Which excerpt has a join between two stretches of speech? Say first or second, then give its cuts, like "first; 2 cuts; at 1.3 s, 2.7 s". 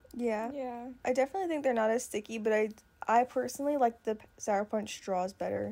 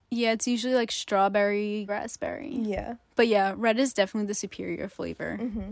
second; 1 cut; at 1.9 s